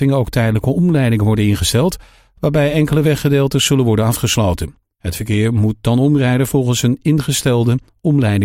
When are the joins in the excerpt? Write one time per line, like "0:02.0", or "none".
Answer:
none